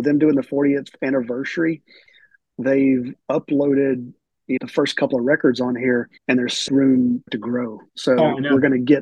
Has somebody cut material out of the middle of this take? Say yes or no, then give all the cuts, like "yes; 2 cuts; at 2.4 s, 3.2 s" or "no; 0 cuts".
yes; 6 cuts; at 3.2 s, 4.6 s, 6.2 s, 6.7 s, 7.3 s, 7.9 s